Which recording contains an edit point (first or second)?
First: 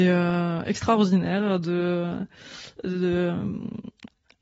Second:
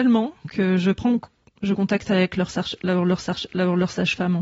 second